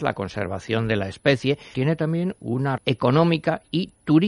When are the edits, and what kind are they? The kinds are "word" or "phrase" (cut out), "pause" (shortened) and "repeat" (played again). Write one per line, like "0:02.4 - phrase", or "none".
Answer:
0:01.7 - word
0:02.8 - word